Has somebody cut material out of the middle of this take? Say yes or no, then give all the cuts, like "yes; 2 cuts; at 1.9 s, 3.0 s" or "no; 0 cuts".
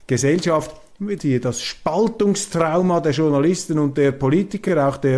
yes; 1 cut; at 1.2 s